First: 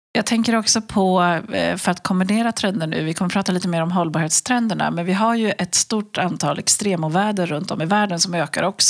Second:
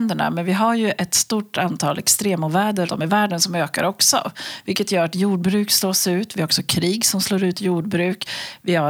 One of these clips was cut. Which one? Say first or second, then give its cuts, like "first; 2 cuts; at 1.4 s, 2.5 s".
second; 1 cut; at 2.9 s